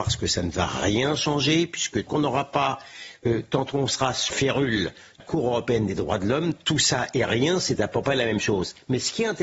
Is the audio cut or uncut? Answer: cut